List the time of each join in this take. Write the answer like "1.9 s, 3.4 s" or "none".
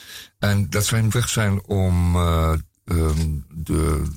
1.1 s